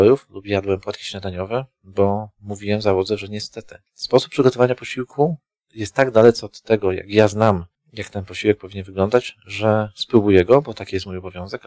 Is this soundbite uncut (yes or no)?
yes